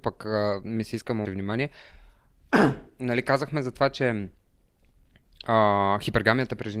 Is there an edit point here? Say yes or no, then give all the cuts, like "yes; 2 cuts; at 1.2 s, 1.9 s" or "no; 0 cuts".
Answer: yes; 1 cut; at 1.3 s